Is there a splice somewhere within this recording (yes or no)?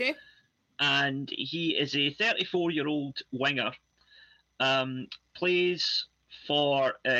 no